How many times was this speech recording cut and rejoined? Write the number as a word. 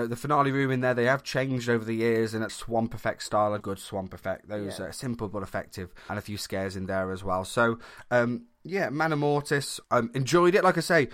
four